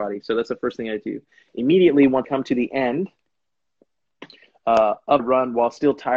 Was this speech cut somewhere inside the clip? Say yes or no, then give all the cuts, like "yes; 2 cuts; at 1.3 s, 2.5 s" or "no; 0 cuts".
yes; 2 cuts; at 2.2 s, 5.2 s